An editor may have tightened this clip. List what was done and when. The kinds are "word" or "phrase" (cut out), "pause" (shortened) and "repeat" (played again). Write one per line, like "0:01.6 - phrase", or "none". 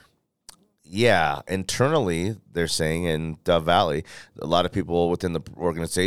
none